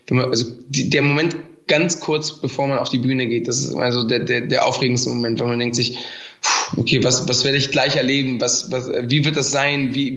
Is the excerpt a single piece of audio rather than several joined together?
yes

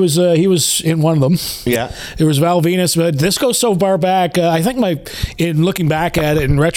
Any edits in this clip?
no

